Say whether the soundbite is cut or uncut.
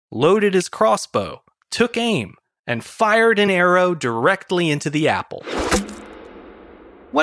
uncut